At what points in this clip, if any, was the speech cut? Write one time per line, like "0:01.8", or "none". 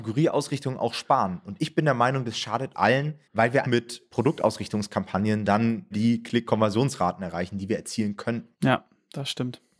0:02.7
0:03.2
0:03.6
0:05.9
0:06.5
0:08.5

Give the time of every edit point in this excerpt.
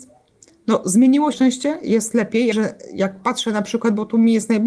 0:01.3
0:02.5

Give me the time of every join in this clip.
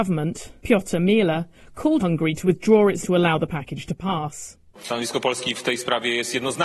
0:02.0
0:03.0

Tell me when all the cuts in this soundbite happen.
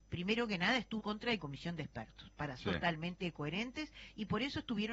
0:01.0
0:01.4
0:02.6

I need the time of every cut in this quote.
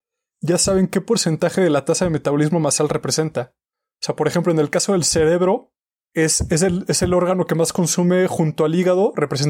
none

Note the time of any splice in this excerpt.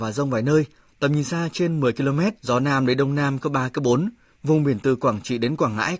0:02.4
0:04.3

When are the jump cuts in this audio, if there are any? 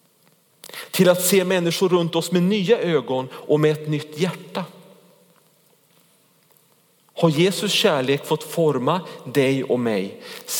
none

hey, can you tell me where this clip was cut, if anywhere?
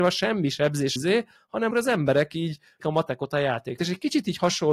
0:01.0
0:01.7
0:02.8
0:03.8

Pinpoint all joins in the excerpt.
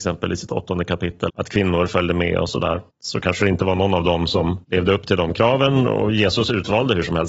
0:01.3
0:02.9
0:04.6

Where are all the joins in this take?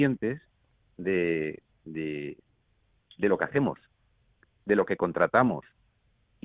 none

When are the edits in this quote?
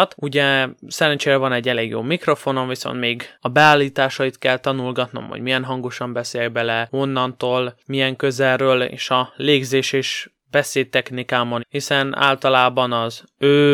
0:03.3
0:11.6

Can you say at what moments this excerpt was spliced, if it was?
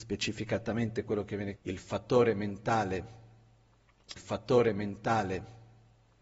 0:01.6
0:04.2

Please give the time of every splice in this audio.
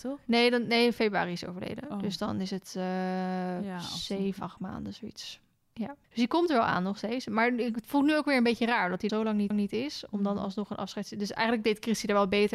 0:04.4
0:06.0
0:09.1
0:09.5

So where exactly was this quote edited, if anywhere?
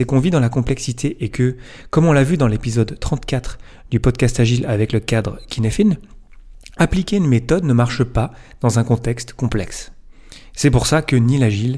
none

